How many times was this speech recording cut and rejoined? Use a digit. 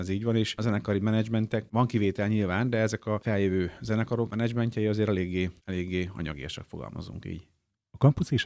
1